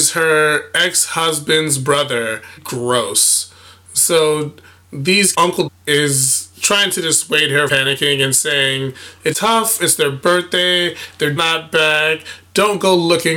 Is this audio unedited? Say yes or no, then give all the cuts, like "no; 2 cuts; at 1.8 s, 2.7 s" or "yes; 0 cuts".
no; 6 cuts; at 2.6 s, 5.3 s, 5.7 s, 7.7 s, 9.3 s, 11.4 s